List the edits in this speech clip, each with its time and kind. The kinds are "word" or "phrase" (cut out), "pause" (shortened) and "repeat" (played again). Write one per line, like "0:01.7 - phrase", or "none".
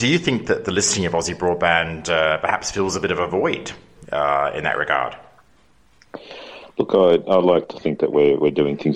none